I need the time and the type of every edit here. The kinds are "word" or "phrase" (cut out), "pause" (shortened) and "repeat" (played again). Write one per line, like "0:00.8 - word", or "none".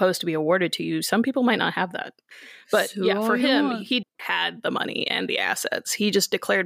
0:04.0 - word